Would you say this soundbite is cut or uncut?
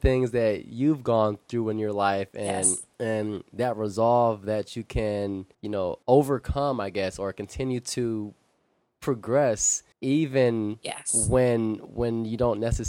cut